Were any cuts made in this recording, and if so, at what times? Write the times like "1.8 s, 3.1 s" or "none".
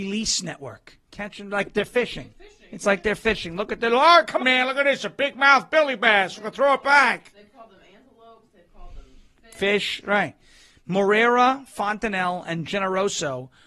1.0 s, 4.4 s